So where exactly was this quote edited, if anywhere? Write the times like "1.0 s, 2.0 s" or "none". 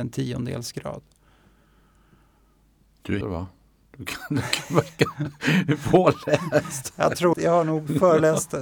3.2 s, 7.3 s